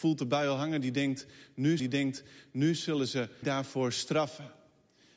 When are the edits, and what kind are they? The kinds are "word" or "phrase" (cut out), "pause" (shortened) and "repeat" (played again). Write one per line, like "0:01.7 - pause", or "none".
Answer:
0:01.8 - repeat
0:03.4 - word